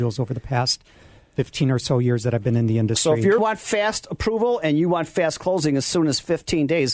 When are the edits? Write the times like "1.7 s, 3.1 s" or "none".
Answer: 3.4 s

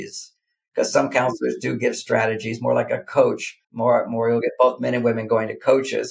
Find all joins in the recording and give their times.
3.6 s

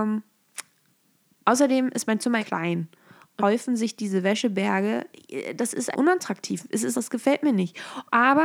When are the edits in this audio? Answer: 2.4 s, 3.4 s, 5.9 s, 6.9 s

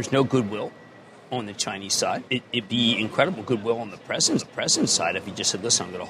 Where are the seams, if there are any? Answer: 2.3 s, 2.6 s, 4.4 s

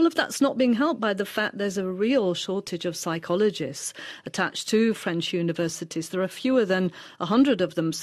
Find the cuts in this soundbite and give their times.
none

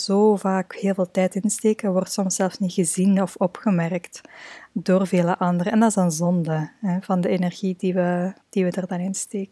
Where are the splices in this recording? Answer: 8.4 s

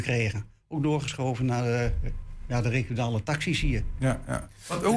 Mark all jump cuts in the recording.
none

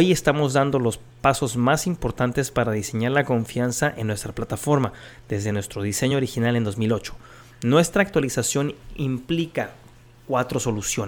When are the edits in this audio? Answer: none

